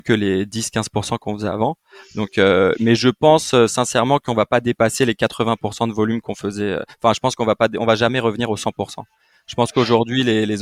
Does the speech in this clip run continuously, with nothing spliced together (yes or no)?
yes